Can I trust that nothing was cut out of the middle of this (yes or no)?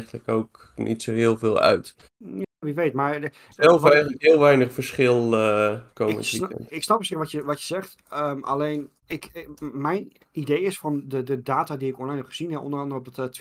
no